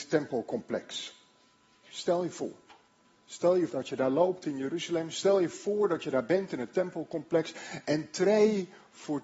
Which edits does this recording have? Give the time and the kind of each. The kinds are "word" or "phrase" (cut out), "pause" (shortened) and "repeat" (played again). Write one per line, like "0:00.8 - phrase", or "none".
0:01.4 - pause
0:02.9 - pause
0:03.7 - word